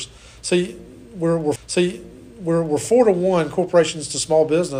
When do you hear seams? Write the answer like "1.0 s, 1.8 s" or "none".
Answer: 1.6 s